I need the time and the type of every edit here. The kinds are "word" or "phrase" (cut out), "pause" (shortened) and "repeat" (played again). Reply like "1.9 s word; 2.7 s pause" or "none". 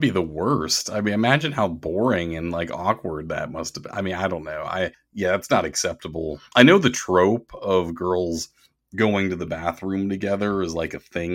none